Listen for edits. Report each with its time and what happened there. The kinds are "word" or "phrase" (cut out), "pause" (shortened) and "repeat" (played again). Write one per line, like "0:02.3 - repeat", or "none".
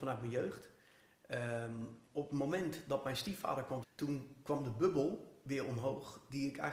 0:02.1 - word
0:03.8 - word